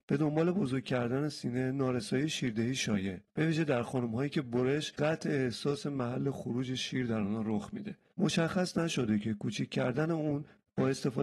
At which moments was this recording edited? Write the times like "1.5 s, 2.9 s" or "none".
3.2 s, 5.0 s